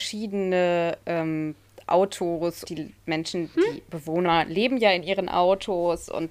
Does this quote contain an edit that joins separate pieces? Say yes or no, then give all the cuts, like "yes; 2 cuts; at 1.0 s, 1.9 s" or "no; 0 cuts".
yes; 2 cuts; at 2.6 s, 3.5 s